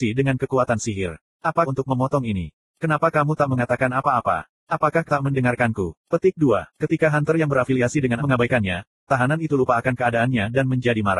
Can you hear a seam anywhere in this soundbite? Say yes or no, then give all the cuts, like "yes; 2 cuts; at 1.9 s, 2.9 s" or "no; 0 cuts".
yes; 4 cuts; at 1.7 s, 5.1 s, 6.7 s, 8.2 s